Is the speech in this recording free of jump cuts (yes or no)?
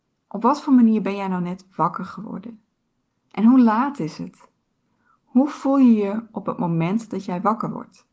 yes